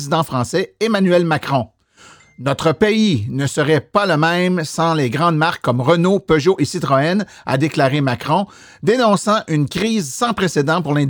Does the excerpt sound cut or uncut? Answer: uncut